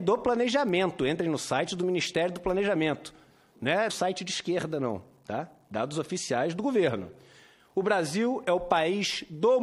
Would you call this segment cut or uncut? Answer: cut